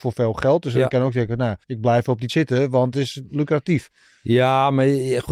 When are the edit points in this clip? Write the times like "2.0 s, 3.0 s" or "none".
1.6 s, 2.3 s, 2.9 s